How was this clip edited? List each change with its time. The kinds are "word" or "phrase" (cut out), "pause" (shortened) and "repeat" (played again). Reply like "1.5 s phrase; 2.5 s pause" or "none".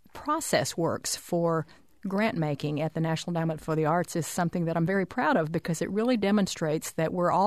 none